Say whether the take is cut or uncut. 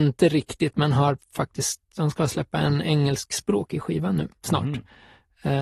cut